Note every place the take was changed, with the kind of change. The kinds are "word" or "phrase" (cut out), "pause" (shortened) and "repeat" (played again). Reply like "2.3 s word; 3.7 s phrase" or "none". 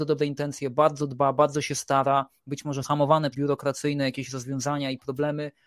2.8 s word; 3.3 s word